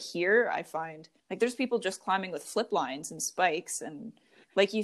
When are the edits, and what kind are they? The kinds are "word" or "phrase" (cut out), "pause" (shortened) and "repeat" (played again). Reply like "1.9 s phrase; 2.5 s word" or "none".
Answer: 1.2 s pause